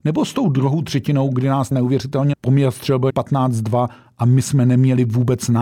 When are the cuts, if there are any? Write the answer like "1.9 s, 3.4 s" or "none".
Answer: 1.7 s, 2.3 s, 3.1 s